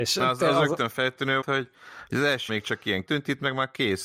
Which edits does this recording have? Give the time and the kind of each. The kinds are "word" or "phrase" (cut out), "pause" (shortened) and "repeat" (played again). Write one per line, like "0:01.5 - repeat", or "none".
0:01.4 - word
0:02.5 - word
0:03.0 - word